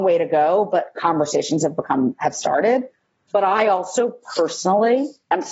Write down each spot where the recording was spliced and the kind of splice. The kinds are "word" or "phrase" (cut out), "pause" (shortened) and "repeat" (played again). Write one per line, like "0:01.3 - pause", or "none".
none